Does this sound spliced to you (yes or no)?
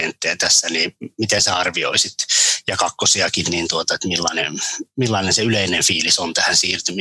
no